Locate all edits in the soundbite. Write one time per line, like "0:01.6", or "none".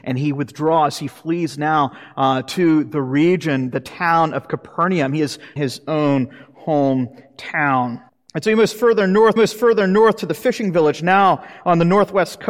0:05.6
0:08.1
0:09.4